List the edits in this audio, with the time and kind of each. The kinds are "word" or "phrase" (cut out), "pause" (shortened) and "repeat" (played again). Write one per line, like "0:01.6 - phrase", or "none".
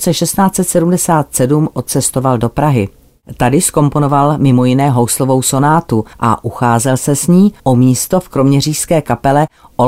0:06.1 - pause
0:07.6 - pause